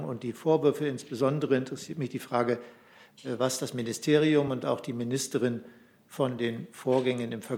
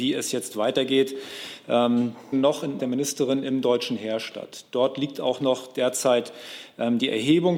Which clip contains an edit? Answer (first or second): second